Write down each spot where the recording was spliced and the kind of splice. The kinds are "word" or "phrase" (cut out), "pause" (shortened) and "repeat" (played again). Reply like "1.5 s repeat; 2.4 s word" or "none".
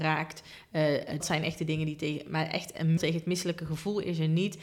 1.2 s word; 3.0 s word